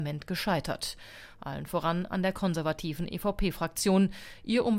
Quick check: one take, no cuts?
yes; 0 cuts

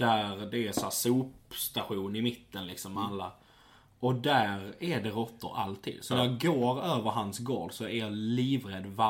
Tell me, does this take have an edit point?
no; 0 cuts

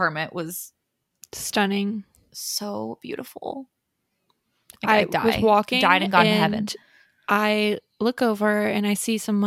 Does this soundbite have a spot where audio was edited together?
no; 0 cuts

